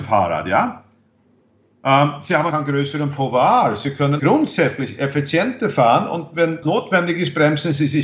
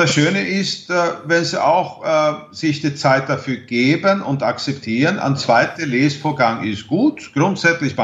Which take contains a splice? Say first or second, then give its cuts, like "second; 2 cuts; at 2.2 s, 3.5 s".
first; 3 cuts; at 2.5 s, 4.2 s, 6.6 s